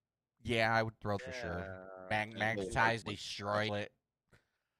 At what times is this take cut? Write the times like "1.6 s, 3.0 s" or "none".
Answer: 1.2 s, 3.0 s, 3.7 s